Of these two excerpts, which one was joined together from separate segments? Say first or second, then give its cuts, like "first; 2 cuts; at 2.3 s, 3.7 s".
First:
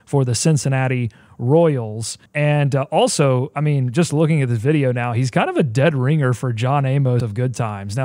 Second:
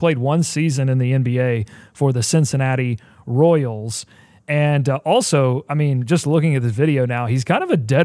first; 1 cut; at 2.3 s